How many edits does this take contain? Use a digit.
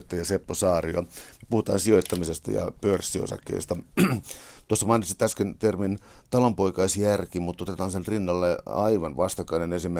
0